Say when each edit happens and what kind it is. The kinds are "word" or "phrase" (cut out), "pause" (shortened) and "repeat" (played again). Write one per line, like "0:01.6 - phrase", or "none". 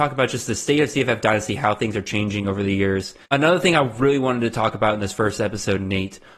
0:03.2 - pause

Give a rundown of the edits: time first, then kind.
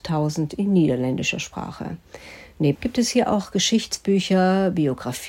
0:02.7 - word

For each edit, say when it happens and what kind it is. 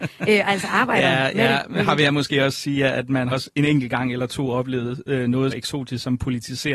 0:03.3 - word
0:05.5 - word

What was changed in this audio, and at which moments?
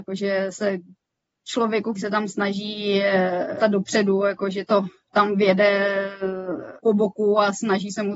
0:02.0 - word
0:03.6 - word
0:04.7 - word
0:06.8 - word

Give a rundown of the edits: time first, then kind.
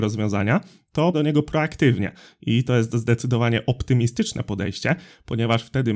0:01.1 - word

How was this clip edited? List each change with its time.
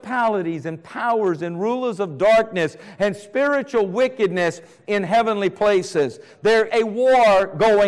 0:06.7 - word

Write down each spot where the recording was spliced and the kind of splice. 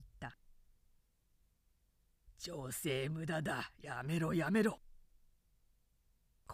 none

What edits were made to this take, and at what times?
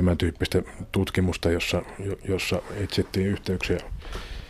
none

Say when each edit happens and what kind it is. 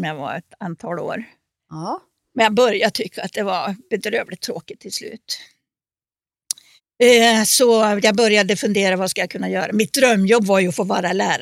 0:06.8 - pause

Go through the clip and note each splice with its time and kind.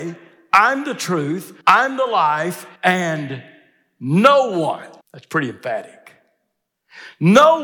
0:01.6 - pause
0:02.8 - pause
0:05.0 - pause

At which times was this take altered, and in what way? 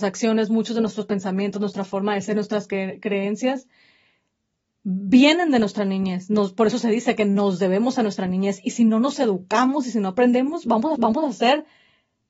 0:11.0 - repeat

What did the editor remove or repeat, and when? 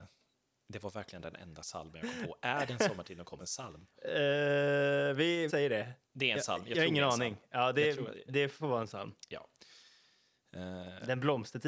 0:03.4 - word
0:05.5 - word
0:06.0 - pause
0:08.6 - word
0:09.2 - pause

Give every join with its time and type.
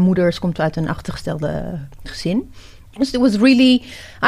0:02.9 - pause

